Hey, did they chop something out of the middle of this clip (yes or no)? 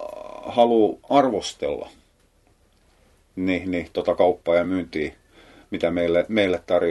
no